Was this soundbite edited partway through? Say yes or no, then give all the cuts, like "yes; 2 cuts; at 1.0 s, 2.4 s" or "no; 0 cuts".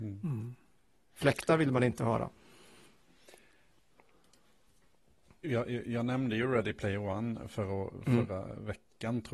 no; 0 cuts